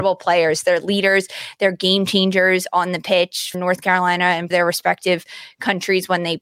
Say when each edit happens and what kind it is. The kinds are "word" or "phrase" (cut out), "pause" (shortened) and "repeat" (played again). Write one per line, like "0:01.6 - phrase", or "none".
0:03.5 - word
0:04.5 - word